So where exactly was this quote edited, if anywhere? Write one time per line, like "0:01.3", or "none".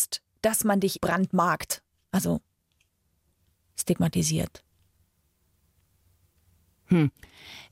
0:01.0